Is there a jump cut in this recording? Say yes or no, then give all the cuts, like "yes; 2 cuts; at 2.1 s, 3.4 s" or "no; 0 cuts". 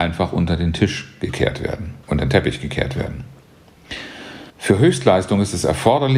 yes; 2 cuts; at 2.0 s, 4.5 s